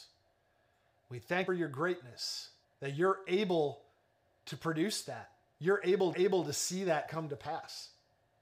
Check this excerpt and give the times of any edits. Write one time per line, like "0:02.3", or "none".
0:01.5
0:02.6
0:06.1